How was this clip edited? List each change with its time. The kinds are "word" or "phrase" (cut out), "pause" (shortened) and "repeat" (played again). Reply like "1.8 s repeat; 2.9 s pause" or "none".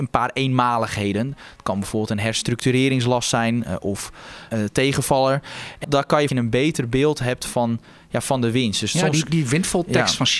4.5 s phrase; 5.8 s word; 6.3 s phrase